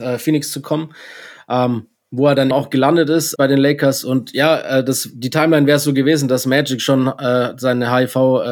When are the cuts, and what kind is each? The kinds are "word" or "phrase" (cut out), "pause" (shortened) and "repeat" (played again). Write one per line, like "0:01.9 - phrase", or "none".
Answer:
0:02.5 - word
0:03.4 - word